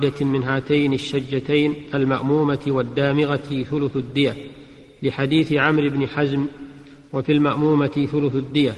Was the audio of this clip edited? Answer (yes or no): no